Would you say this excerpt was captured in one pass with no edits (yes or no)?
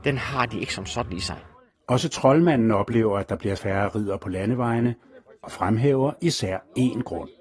no